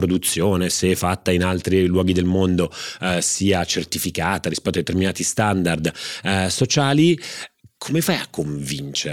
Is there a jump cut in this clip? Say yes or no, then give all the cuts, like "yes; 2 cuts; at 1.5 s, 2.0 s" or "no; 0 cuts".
no; 0 cuts